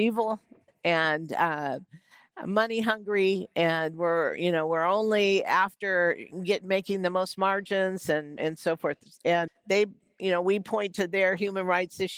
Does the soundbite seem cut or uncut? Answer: cut